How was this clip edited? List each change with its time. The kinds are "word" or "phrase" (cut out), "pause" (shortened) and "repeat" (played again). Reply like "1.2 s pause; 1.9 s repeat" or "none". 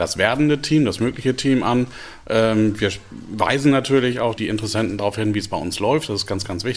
4.4 s word